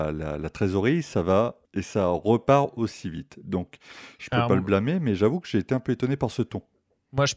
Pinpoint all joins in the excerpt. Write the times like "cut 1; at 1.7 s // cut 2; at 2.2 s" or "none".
cut 1; at 1.6 s

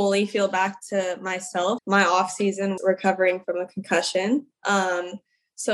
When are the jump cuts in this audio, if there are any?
cut 1; at 1.8 s // cut 2; at 2.8 s

